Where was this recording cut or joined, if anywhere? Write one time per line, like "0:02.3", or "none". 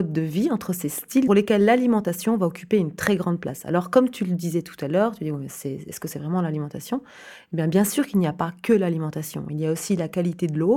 0:01.3

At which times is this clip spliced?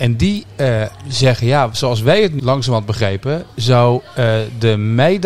0:02.4

